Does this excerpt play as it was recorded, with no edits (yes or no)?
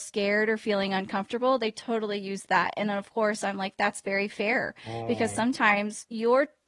yes